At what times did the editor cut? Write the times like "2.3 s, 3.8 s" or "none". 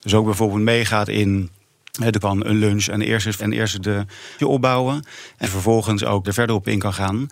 2.2 s, 3.4 s, 4.4 s, 5.4 s, 6.2 s